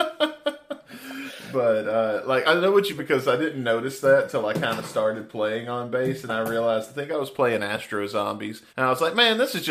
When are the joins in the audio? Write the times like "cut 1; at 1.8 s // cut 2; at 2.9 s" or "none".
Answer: cut 1; at 2.4 s // cut 2; at 3.0 s // cut 3; at 6.3 s // cut 4; at 8.7 s